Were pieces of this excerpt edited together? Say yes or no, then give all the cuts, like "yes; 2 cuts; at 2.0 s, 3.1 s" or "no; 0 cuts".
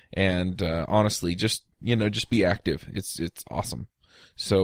yes; 1 cut; at 1.7 s